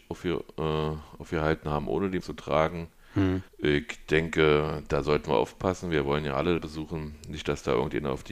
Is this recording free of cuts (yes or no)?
no